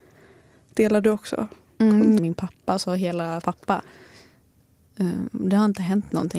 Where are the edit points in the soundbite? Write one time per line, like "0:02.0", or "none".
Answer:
0:02.2
0:03.4

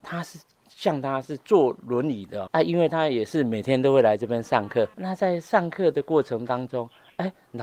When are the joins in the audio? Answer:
0:02.5
0:04.9

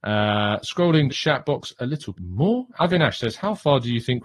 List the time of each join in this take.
0:01.1
0:02.1
0:02.7

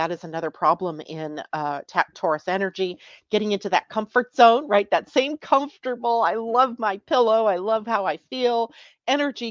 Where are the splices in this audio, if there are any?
none

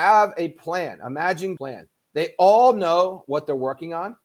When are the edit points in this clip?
0:01.6

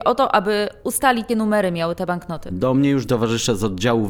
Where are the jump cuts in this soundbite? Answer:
0:01.3
0:03.1

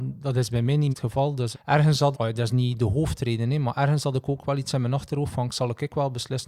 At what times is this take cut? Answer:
0:00.9
0:01.5
0:02.1

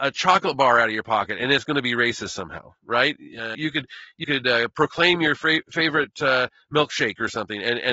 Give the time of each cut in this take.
0:03.5
0:04.2

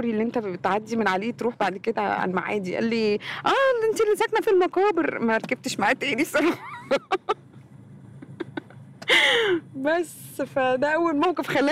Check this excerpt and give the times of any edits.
0:04.4

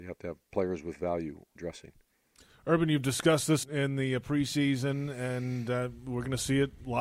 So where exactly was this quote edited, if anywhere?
0:01.6
0:03.6

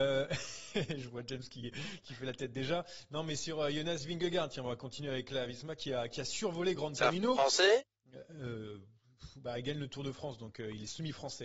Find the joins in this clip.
none

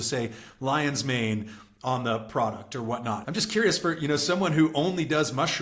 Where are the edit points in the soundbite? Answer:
0:03.2

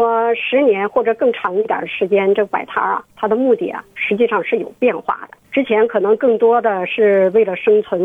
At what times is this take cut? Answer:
0:03.1
0:03.9
0:05.4

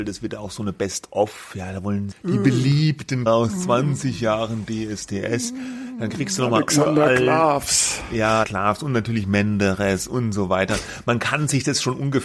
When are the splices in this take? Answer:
0:02.1
0:03.3
0:08.4

